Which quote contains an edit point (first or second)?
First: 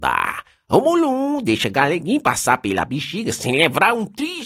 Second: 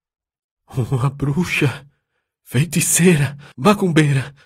second